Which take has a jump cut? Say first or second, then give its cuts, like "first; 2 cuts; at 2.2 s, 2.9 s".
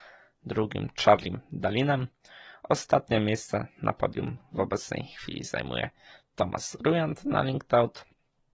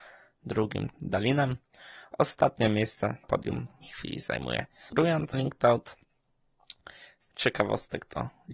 second; 6 cuts; at 0.9 s, 3.2 s, 3.8 s, 4.9 s, 5.3 s, 7.3 s